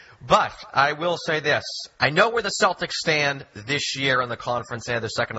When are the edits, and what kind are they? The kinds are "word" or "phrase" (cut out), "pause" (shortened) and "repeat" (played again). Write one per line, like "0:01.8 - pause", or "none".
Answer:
0:01.9 - pause